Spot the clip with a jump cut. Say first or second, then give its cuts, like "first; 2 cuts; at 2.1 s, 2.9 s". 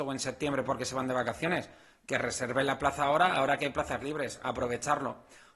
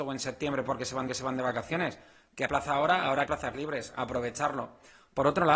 second; 3 cuts; at 1.1 s, 2.5 s, 3.3 s